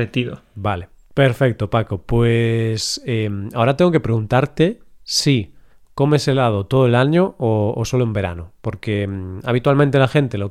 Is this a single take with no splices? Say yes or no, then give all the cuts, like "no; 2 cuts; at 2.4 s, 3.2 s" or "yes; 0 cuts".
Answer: yes; 0 cuts